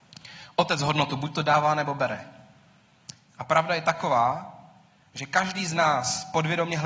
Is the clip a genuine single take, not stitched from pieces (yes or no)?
yes